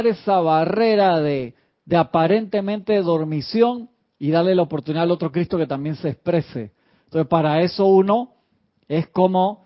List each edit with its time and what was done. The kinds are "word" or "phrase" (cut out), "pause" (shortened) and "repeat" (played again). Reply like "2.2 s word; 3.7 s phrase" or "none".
none